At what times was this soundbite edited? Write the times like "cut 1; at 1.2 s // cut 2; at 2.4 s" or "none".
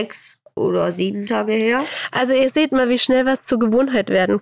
none